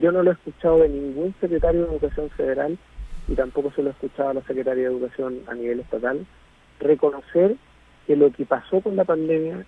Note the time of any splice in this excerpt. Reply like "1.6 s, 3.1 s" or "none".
none